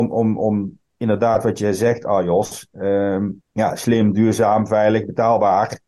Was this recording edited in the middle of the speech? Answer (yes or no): yes